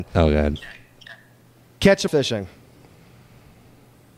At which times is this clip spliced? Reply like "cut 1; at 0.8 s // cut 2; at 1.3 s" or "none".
cut 1; at 2.1 s